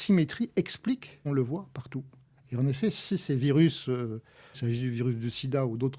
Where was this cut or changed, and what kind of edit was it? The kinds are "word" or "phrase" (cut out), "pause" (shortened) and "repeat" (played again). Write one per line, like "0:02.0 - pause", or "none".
0:01.2 - word
0:04.5 - phrase